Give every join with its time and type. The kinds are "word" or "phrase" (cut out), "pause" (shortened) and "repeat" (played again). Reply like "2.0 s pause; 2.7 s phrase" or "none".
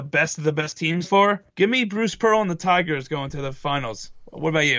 1.0 s word; 1.5 s pause